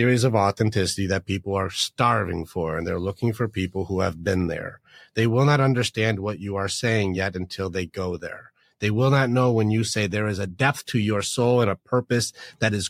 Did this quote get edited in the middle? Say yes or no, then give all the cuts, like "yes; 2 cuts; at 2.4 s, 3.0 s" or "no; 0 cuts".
no; 0 cuts